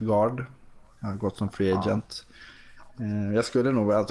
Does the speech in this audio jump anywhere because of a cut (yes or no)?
no